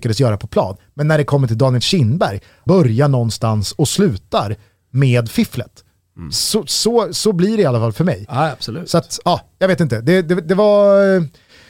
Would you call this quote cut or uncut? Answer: cut